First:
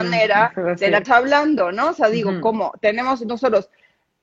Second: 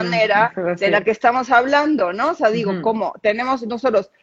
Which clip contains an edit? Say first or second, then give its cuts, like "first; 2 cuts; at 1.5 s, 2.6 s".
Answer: first; 1 cut; at 1.1 s